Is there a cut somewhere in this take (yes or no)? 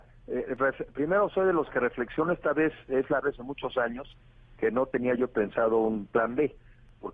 yes